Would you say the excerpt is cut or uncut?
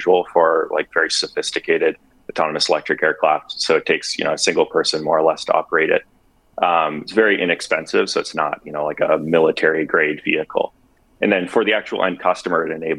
uncut